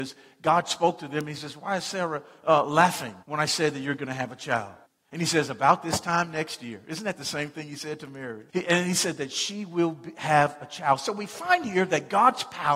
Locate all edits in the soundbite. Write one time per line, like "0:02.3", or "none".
0:03.2
0:04.8
0:08.5